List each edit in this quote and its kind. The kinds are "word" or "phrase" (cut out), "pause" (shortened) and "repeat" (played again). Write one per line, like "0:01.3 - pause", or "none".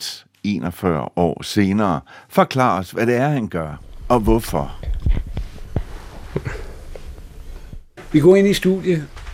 none